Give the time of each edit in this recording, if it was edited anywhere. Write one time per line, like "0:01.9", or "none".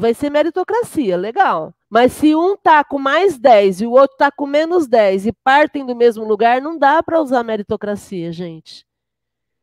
0:01.8